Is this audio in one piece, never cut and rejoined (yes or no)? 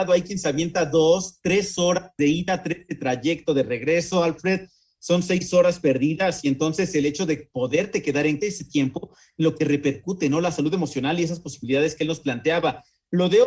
no